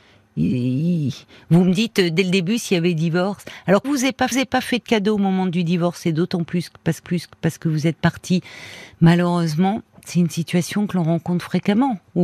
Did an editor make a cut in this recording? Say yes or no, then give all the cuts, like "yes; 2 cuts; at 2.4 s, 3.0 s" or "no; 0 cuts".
yes; 3 cuts; at 3.8 s, 4.3 s, 7.0 s